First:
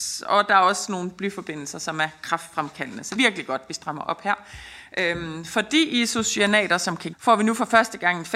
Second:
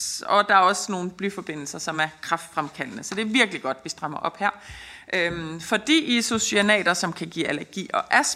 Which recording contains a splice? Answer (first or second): first